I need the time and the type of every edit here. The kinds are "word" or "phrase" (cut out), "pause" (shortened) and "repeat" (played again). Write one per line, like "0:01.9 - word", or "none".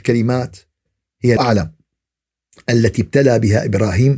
0:01.4 - phrase